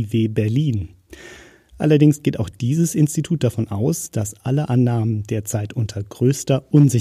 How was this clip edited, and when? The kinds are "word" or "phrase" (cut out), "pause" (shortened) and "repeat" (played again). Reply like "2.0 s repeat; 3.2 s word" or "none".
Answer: none